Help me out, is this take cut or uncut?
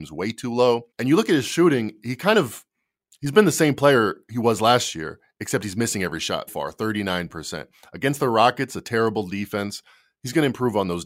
cut